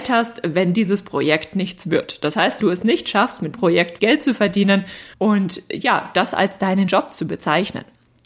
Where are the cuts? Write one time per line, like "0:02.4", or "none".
0:02.6
0:03.5
0:04.0
0:05.1
0:06.9